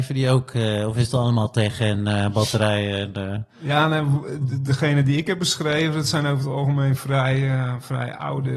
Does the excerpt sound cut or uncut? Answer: uncut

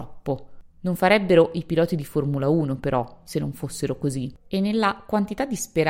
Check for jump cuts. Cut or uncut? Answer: uncut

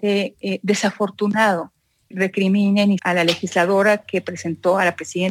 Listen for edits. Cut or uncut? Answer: cut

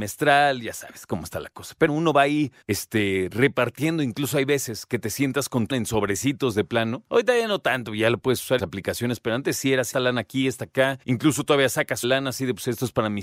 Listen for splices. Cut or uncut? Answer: cut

